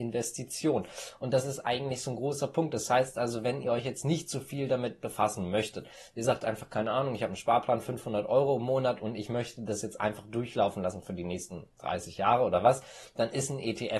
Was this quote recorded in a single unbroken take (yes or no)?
yes